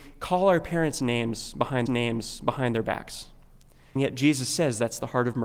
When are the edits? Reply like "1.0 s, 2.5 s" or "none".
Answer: 1.9 s, 4.0 s